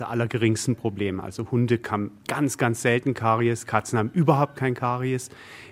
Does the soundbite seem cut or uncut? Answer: uncut